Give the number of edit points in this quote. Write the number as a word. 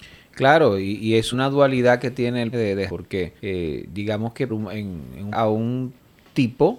six